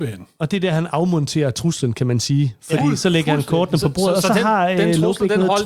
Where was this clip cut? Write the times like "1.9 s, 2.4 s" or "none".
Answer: none